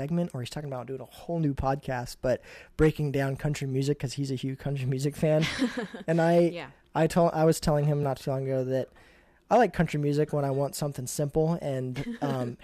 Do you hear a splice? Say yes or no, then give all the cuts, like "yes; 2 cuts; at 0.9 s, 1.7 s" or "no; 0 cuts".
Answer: no; 0 cuts